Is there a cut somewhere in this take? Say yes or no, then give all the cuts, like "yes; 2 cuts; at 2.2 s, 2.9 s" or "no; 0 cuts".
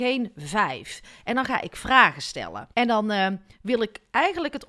yes; 1 cut; at 2.7 s